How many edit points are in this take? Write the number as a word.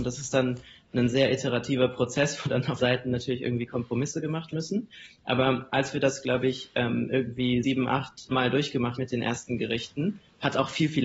five